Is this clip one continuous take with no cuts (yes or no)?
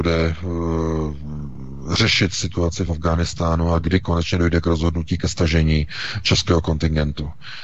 yes